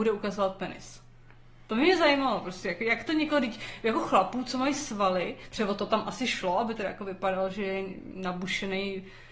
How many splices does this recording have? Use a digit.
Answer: 0